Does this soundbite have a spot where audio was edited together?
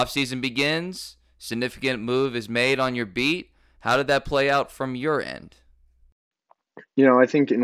no; 0 cuts

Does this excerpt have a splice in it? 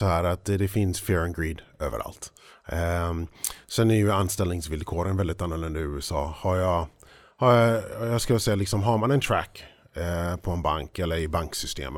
no; 0 cuts

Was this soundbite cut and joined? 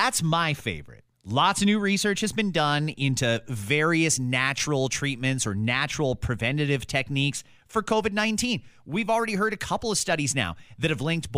yes; 1 cut; at 1.1 s

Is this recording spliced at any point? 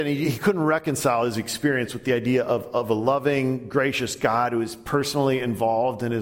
no; 0 cuts

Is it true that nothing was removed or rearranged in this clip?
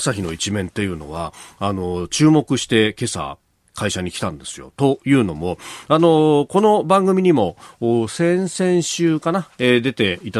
yes; 0 cuts

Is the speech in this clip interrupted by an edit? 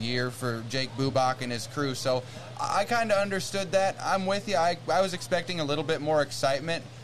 no; 0 cuts

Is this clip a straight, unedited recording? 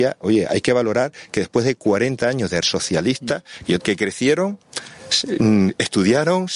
no; 2 cuts; at 2.6 s, 3.8 s

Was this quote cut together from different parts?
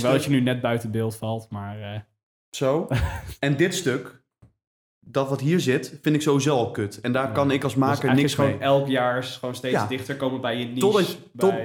no; 0 cuts

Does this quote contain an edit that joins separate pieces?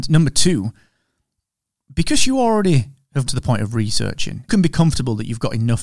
yes; 2 cuts; at 3.3 s, 4.5 s

